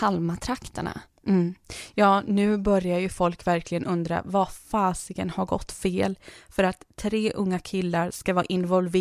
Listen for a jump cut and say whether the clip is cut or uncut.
uncut